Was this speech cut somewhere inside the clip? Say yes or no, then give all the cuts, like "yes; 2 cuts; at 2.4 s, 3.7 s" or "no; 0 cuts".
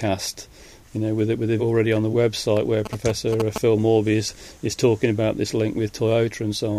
yes; 2 cuts; at 1.6 s, 2.1 s